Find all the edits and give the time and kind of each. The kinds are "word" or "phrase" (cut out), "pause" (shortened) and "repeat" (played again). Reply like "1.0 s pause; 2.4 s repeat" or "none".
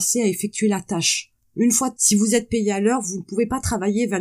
2.0 s word